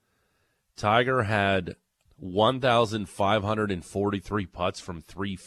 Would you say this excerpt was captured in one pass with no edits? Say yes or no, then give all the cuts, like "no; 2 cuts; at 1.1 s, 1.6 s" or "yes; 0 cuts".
no; 1 cut; at 2.1 s